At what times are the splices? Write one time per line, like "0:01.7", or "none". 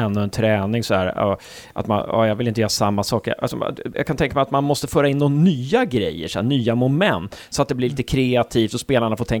0:03.9